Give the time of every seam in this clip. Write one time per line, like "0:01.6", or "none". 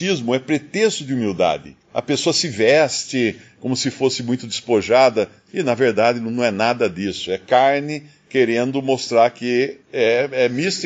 0:01.8
0:09.8